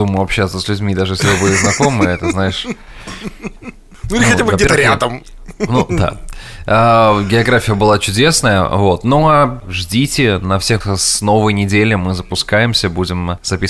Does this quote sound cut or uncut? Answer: cut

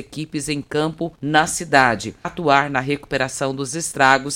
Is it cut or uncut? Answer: cut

